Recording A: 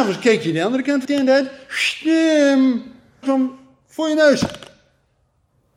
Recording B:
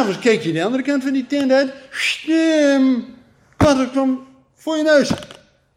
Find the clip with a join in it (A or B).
A